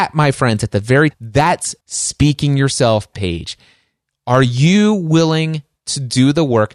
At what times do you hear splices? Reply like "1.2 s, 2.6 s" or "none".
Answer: 1.1 s, 1.8 s, 3.1 s